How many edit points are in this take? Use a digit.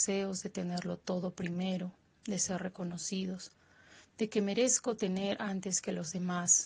0